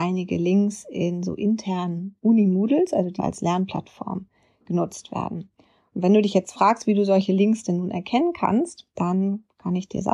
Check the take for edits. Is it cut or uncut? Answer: cut